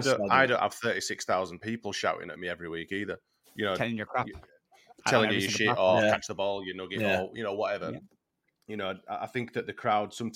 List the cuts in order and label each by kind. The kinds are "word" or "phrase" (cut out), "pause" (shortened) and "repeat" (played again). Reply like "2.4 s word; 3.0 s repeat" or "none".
none

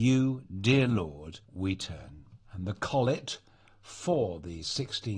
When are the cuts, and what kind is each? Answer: 1.4 s pause; 2.4 s pause

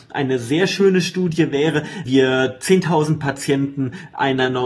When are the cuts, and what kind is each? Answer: 2.1 s word

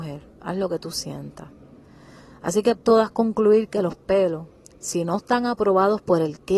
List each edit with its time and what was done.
2.8 s word

